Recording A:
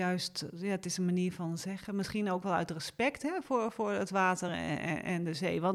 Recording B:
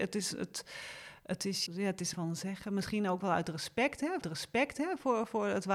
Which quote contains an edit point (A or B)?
B